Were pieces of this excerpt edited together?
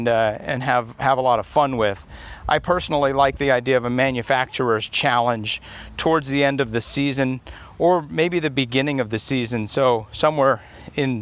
no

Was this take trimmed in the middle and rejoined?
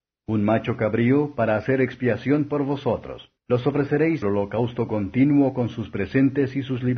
yes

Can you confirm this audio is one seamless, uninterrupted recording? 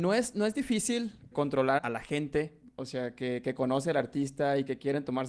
no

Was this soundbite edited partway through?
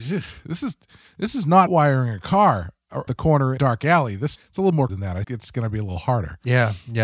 yes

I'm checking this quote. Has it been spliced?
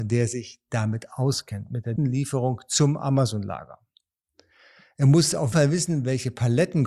yes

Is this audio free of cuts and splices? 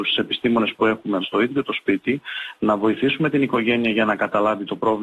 no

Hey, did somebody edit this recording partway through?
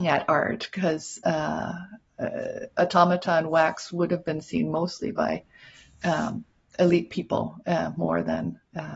no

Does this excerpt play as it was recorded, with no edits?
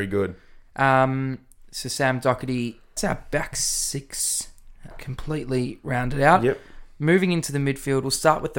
no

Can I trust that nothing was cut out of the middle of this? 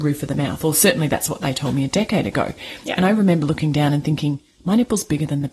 yes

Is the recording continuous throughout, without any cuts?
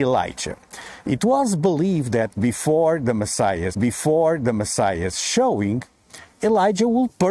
no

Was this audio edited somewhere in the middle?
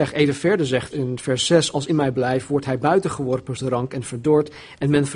yes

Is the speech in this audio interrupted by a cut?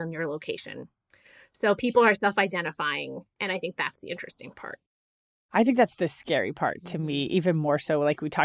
no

